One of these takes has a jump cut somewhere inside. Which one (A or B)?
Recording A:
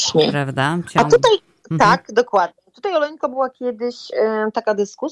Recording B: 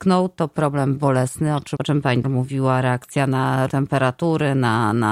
B